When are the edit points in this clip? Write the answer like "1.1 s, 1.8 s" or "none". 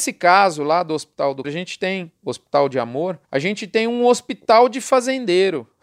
1.4 s, 3.2 s